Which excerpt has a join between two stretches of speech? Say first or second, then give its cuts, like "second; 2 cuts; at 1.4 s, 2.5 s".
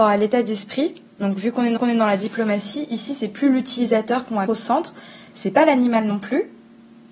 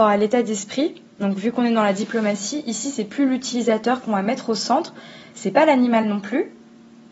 first; 2 cuts; at 1.8 s, 4.5 s